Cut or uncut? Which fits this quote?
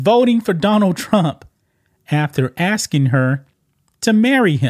uncut